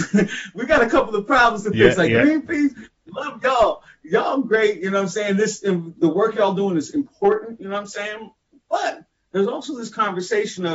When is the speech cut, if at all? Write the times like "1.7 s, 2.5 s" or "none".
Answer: 6.0 s